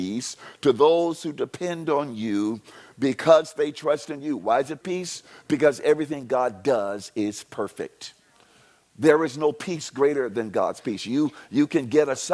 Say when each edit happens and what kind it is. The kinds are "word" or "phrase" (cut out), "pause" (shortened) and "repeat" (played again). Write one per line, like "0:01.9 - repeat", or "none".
0:04.8 - word